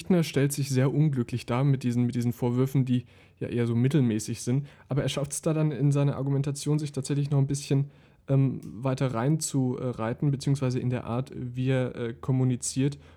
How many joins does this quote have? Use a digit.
0